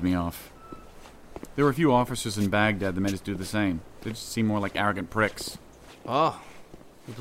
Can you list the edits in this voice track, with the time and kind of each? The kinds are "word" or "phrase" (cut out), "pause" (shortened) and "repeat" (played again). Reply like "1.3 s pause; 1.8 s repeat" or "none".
none